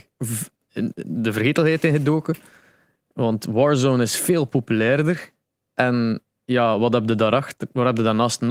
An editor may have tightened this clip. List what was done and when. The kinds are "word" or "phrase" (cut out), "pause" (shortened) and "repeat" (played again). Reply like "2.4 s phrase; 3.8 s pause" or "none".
none